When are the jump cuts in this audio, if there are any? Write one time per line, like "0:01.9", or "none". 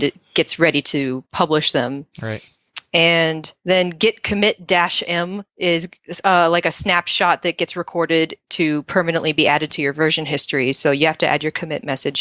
0:01.2
0:05.5